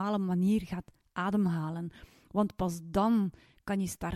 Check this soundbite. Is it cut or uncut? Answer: uncut